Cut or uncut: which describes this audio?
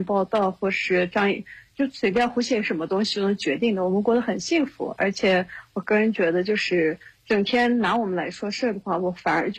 uncut